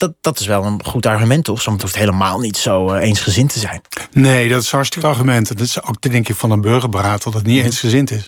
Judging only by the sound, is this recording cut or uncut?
cut